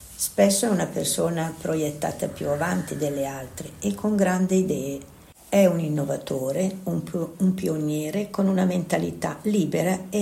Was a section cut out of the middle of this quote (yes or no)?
no